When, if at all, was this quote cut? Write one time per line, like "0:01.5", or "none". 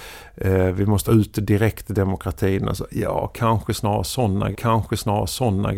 0:01.1
0:04.5

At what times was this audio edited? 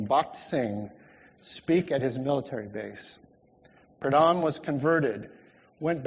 none

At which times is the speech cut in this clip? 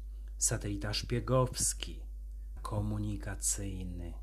0:02.6

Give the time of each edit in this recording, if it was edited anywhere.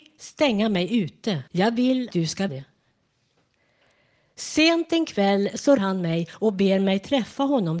0:01.5
0:02.1
0:02.5
0:05.8

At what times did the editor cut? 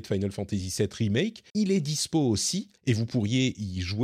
0:01.5
0:02.8

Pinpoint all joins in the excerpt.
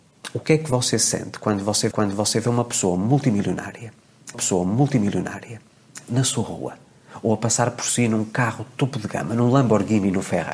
0:01.9
0:04.3

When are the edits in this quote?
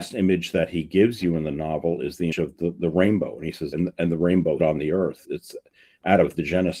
0:02.3
0:03.7
0:04.6
0:05.2

